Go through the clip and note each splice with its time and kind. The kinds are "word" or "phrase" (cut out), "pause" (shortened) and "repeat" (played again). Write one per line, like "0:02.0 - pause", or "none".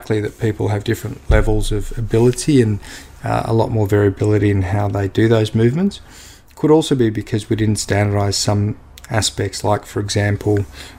none

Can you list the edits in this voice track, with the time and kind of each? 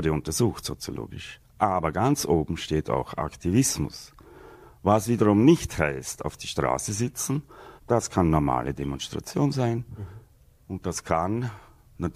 0:07.8 - pause

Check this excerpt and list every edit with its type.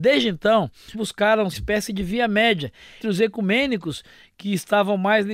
0:00.9 - phrase
0:01.5 - phrase
0:03.0 - word

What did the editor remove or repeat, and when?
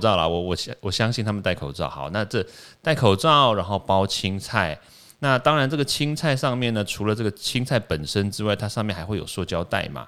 none

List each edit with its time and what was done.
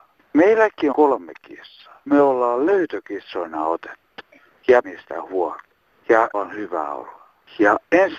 0:00.9 - word
0:02.1 - word
0:04.8 - word
0:06.3 - word

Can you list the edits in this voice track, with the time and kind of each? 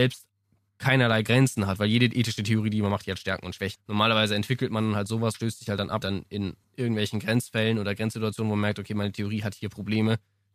0:03.8 - word
0:05.3 - word
0:06.0 - phrase
0:06.6 - pause

